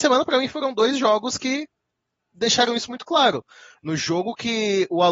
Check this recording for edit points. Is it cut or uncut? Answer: uncut